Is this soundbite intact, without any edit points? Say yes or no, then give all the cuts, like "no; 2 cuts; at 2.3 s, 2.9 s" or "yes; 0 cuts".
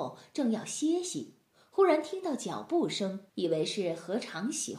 no; 1 cut; at 3.3 s